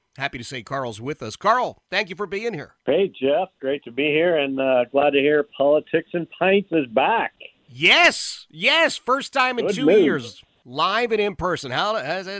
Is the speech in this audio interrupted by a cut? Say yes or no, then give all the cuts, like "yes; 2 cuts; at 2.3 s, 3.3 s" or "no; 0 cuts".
yes; 1 cut; at 2.8 s